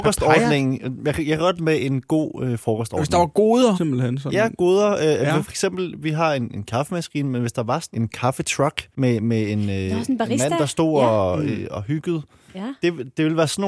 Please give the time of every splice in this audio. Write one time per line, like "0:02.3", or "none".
0:01.6
0:03.7
0:07.9
0:08.9